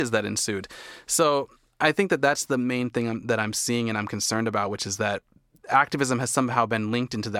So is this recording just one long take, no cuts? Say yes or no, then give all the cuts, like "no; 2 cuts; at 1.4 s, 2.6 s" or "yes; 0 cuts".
yes; 0 cuts